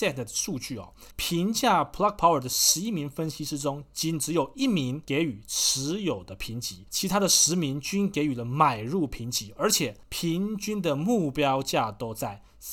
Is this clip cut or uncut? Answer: cut